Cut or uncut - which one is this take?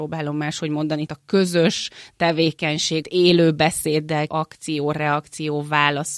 cut